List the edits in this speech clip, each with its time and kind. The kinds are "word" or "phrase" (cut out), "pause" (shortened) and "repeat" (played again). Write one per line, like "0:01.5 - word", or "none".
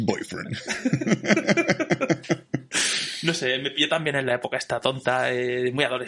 none